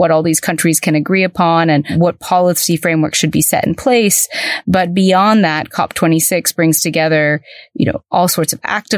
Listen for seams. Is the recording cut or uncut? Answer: uncut